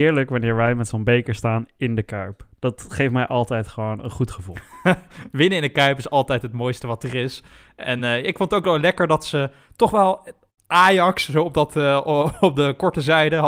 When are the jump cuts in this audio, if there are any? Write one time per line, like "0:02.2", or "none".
none